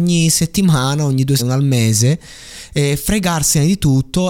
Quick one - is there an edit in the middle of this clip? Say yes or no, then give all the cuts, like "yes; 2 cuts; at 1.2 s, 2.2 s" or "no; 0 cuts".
yes; 1 cut; at 1.4 s